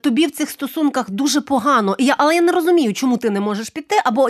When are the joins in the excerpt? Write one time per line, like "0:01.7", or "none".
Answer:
none